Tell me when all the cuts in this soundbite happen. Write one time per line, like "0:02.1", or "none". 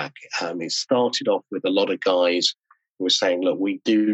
none

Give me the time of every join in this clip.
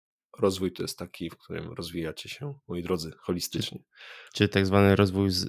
0:02.6
0:04.3

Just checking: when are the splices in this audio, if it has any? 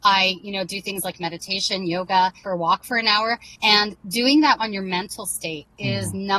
0:02.4
0:03.6
0:04.6

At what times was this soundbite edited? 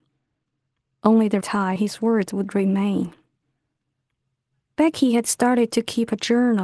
0:01.4
0:01.8

